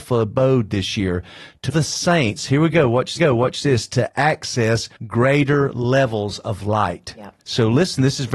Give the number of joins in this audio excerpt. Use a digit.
4